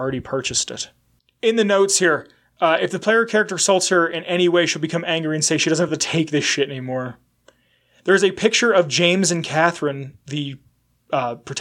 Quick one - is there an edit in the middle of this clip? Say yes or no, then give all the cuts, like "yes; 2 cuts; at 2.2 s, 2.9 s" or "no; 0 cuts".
no; 0 cuts